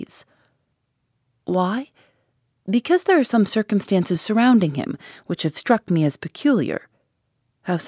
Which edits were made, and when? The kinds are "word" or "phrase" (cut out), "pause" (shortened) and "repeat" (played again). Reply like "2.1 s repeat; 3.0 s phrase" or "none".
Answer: none